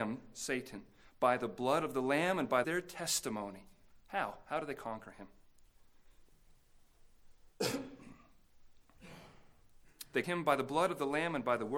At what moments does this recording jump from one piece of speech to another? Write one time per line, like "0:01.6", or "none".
0:02.6
0:04.0
0:07.5
0:10.2